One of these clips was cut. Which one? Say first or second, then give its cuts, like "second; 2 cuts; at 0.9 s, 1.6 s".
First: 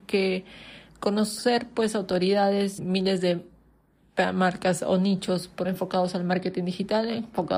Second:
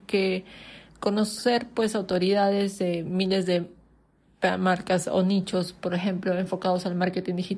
first; 2 cuts; at 2.8 s, 5.6 s